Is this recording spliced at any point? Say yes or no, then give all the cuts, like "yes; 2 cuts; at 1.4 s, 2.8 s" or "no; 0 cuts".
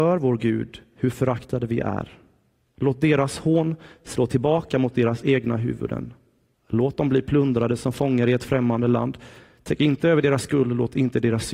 no; 0 cuts